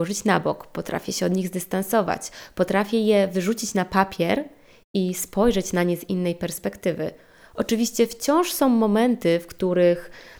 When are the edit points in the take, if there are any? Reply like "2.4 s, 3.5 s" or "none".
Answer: none